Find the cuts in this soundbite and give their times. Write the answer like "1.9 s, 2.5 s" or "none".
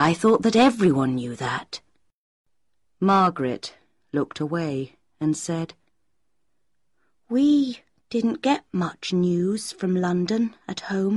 none